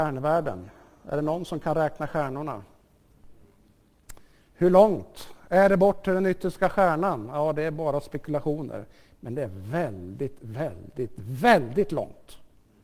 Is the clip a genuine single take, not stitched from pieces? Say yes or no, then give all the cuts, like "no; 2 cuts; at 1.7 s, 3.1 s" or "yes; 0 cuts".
yes; 0 cuts